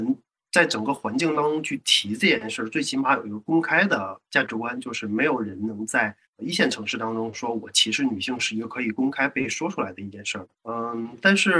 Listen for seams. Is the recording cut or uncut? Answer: cut